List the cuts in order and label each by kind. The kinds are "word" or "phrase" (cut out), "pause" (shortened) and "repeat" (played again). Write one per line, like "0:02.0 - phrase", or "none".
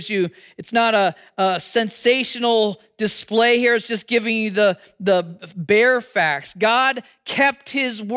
none

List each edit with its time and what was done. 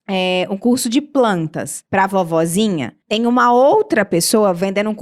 0:01.9 - pause
0:03.0 - pause

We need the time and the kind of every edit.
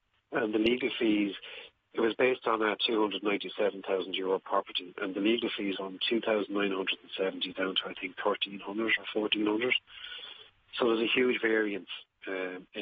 0:05.0 - word
0:05.7 - word

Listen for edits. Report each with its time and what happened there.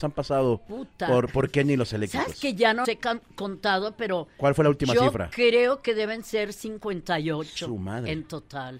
0:02.8 - word

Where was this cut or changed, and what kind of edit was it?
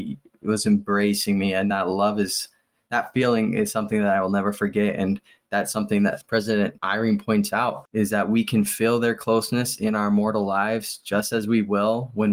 none

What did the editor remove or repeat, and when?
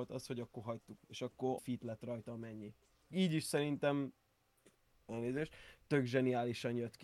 0:01.0 - word
0:01.6 - word
0:03.1 - word

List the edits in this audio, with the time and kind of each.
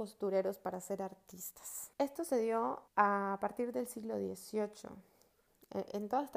0:01.9 - pause
0:02.9 - pause

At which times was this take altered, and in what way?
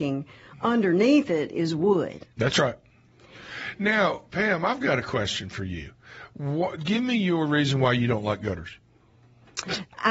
none

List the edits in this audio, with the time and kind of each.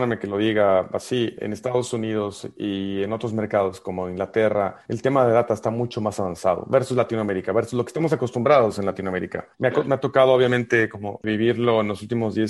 0:09.5 - pause

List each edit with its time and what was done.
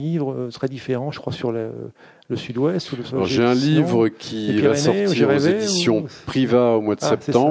none

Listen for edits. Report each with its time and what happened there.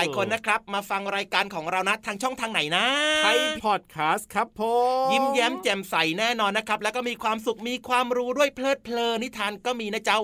0:03.6 - word

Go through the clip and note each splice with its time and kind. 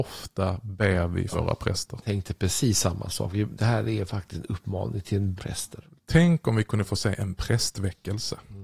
0:01.3 - word
0:05.4 - phrase

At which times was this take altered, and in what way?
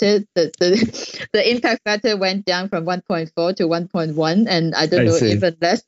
0:01.3 - word

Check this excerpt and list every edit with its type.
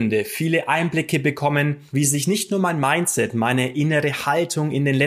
none

